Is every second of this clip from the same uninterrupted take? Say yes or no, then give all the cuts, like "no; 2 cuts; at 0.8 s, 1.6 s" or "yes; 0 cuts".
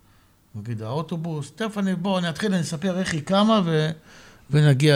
yes; 0 cuts